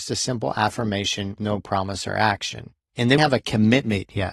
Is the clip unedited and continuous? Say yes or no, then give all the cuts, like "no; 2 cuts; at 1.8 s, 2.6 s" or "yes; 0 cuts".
no; 2 cuts; at 1.4 s, 3.2 s